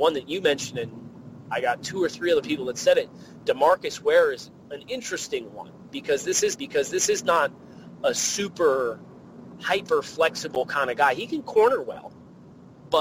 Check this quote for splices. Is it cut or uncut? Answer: cut